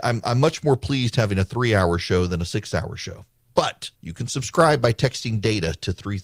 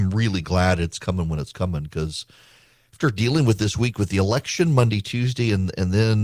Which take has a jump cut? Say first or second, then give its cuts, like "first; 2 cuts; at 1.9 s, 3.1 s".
first; 1 cut; at 4.0 s